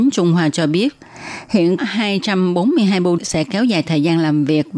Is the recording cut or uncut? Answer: cut